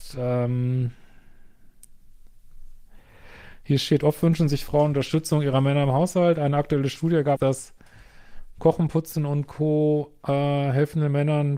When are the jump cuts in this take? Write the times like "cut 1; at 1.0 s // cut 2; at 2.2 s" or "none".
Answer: cut 1; at 7.4 s